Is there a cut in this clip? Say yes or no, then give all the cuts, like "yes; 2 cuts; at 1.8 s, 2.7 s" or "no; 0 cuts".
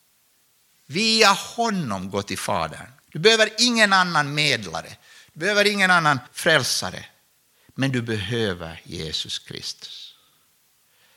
yes; 2 cuts; at 3.0 s, 6.3 s